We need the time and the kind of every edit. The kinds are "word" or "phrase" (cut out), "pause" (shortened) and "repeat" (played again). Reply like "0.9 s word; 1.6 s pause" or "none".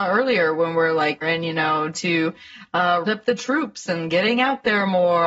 1.2 s phrase; 1.9 s word; 3.1 s word